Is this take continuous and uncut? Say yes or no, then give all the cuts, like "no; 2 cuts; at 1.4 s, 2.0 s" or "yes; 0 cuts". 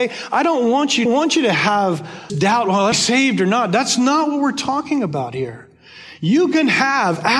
no; 3 cuts; at 1.1 s, 2.3 s, 2.9 s